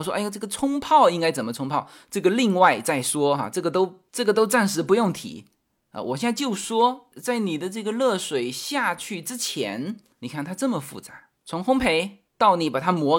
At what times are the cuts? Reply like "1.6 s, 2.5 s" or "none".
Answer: none